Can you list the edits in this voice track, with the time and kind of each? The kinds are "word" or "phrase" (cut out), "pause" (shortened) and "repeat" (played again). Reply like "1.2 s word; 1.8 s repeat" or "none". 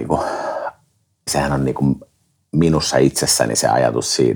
1.3 s word